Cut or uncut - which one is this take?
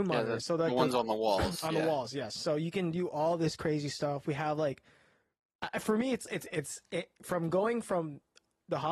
uncut